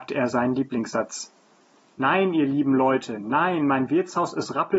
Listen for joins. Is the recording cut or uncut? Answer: uncut